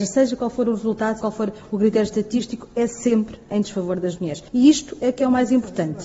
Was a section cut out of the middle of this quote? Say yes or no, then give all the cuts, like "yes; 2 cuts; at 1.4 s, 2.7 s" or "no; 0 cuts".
yes; 2 cuts; at 1.2 s, 4.5 s